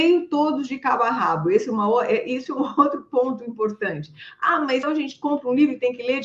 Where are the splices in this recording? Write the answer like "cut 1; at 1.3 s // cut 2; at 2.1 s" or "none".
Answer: cut 1; at 4.8 s